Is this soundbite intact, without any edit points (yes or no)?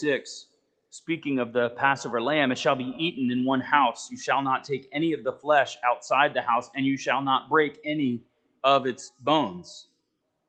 yes